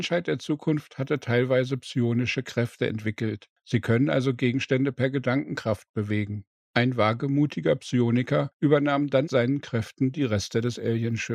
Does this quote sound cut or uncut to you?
cut